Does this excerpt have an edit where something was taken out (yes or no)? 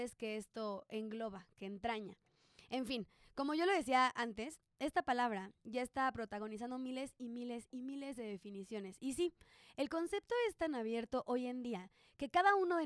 no